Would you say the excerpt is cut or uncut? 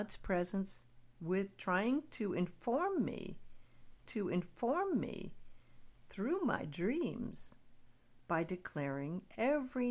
cut